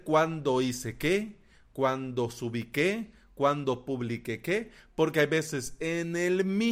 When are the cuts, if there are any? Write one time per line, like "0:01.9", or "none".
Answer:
none